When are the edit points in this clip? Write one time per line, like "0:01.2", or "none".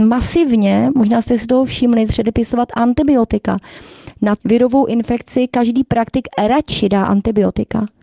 0:02.1
0:04.4